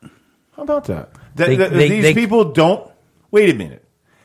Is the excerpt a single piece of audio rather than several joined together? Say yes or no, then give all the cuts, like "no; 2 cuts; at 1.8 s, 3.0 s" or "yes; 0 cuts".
yes; 0 cuts